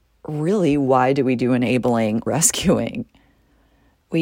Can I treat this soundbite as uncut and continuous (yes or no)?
no